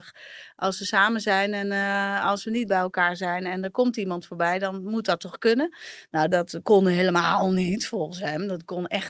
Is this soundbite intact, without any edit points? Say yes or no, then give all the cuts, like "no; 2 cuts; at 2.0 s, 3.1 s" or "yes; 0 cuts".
yes; 0 cuts